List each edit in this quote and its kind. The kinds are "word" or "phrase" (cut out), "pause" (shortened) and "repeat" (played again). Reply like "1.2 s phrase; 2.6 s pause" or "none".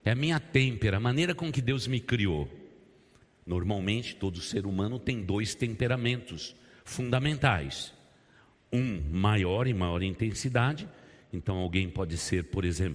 none